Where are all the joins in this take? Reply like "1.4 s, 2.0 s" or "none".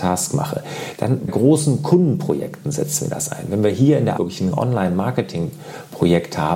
1.3 s, 4.2 s, 4.5 s